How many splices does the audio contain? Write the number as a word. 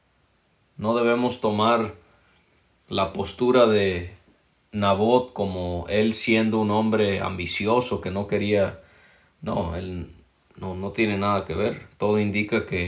zero